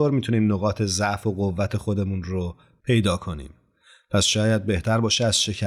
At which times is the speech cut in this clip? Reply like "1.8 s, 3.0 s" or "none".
none